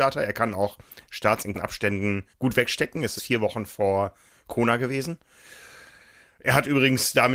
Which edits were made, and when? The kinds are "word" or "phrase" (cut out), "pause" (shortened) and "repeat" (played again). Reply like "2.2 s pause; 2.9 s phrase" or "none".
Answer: 1.5 s word; 2.3 s pause; 3.2 s phrase